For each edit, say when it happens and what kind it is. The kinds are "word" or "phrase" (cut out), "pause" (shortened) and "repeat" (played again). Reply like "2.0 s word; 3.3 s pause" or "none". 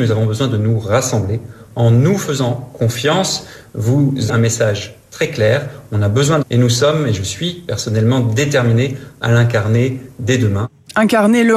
4.3 s word; 6.4 s phrase